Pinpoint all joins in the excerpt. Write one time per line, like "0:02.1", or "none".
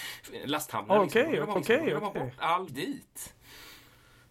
0:01.6
0:02.7